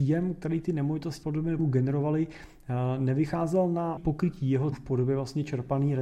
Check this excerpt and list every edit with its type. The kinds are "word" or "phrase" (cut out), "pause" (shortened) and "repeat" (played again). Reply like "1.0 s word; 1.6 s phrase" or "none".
1.2 s word; 1.6 s word; 4.0 s word; 4.7 s word